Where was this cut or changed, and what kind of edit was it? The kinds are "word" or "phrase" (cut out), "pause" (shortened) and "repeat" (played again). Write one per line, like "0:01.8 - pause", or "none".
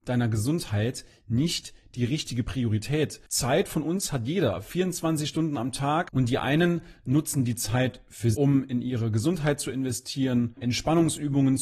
0:03.3 - pause
0:08.3 - word
0:10.6 - word